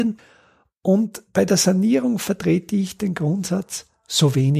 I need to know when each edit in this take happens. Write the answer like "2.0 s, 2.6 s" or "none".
none